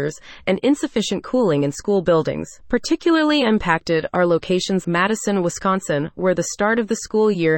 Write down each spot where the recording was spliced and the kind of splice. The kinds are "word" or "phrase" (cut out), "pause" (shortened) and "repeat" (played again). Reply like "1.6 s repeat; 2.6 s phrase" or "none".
2.6 s pause; 4.8 s word